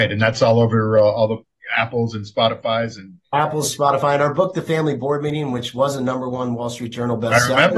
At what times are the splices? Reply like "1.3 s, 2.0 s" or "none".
none